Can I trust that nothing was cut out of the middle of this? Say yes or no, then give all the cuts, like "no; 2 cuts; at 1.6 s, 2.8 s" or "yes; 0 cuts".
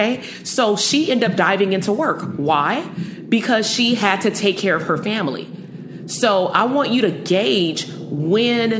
yes; 0 cuts